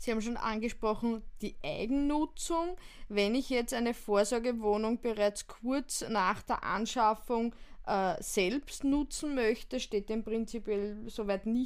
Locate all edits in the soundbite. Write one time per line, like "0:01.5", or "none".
none